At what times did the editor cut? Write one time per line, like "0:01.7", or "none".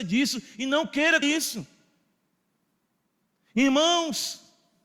0:01.2